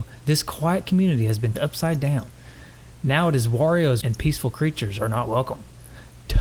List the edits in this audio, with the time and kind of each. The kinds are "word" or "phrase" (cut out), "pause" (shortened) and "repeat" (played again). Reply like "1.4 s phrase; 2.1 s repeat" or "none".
1.5 s word; 4.0 s word